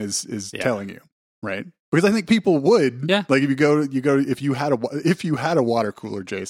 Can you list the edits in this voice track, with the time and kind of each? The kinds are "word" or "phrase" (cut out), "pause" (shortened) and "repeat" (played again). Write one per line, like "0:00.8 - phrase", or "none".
none